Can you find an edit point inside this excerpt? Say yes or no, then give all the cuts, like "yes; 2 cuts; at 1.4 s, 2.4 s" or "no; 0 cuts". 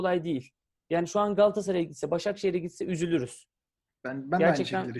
no; 0 cuts